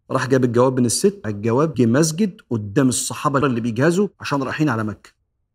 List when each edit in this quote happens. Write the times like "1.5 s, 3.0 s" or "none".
1.2 s, 1.7 s, 3.4 s, 4.1 s